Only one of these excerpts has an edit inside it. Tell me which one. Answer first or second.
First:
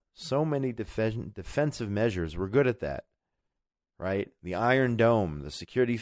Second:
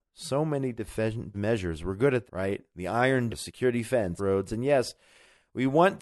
second